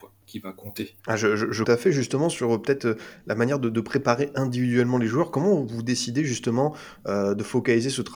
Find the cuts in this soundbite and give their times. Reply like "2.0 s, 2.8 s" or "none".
1.0 s, 1.6 s